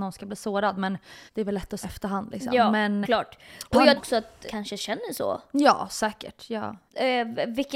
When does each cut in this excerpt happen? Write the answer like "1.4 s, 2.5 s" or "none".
1.3 s, 1.8 s, 3.0 s, 4.0 s, 4.5 s, 6.9 s